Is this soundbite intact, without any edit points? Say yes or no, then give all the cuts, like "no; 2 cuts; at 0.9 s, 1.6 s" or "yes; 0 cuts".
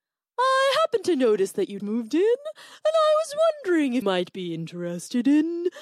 no; 2 cuts; at 1.8 s, 4.0 s